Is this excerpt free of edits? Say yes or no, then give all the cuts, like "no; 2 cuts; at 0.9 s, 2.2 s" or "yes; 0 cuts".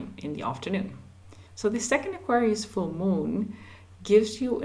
yes; 0 cuts